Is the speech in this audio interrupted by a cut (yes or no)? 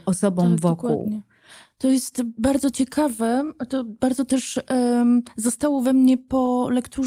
no